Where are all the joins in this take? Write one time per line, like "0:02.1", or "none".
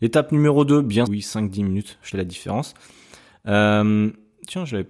0:01.1
0:02.1